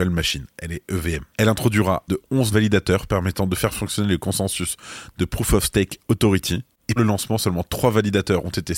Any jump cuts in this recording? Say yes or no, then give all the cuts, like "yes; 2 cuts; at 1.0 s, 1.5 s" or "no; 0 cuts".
yes; 4 cuts; at 1.3 s, 2.1 s, 2.5 s, 7.0 s